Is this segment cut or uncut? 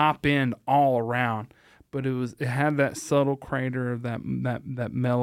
uncut